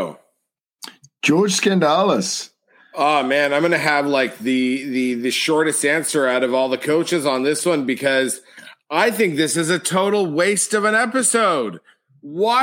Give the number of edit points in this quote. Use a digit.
0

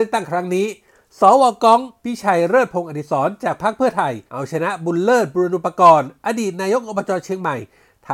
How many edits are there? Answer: 2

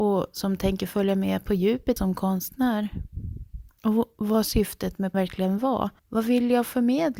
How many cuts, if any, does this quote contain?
4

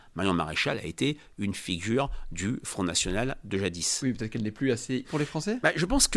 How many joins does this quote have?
1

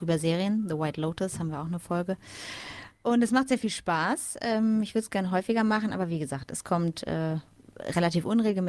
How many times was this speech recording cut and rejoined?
0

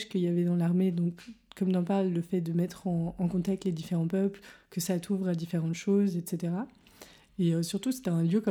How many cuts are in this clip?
0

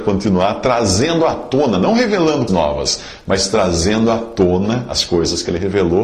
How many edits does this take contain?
1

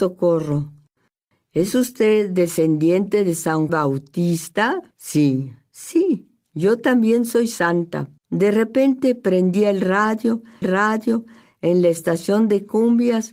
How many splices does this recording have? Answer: 4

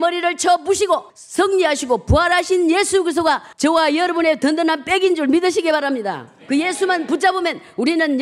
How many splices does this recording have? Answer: 3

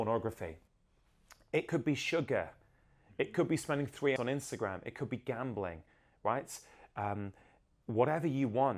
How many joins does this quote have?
1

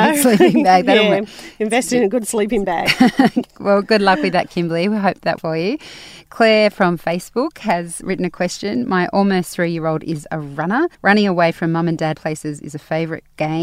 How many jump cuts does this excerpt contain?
4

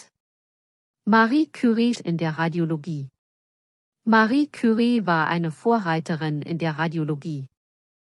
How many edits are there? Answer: 1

